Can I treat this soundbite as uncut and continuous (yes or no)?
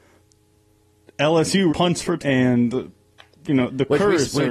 no